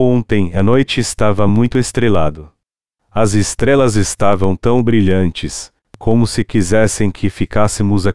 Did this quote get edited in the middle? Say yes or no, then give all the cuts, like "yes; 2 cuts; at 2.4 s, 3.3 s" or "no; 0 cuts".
no; 0 cuts